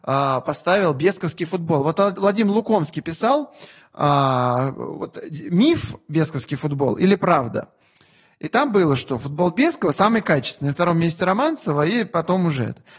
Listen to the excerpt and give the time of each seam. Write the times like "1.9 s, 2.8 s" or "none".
none